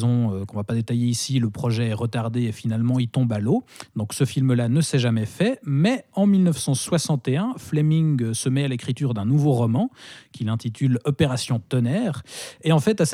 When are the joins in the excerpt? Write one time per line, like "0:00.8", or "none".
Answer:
none